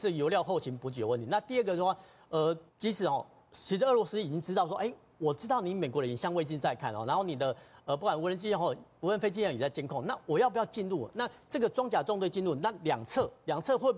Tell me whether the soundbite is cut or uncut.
cut